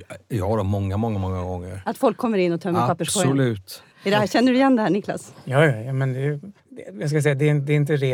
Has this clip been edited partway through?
yes; 2 cuts; at 3.9 s, 6.6 s

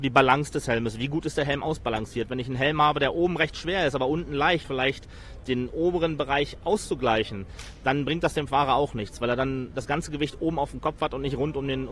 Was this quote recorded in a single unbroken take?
no; 1 cut; at 4.6 s

